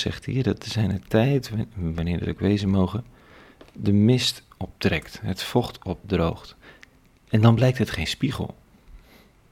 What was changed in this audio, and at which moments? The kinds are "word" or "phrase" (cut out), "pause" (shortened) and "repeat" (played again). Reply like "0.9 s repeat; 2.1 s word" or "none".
none